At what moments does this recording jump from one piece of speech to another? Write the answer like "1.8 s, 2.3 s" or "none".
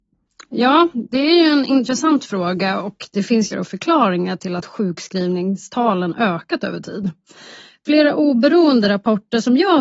3.5 s